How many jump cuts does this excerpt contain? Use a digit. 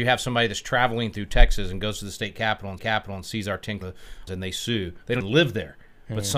4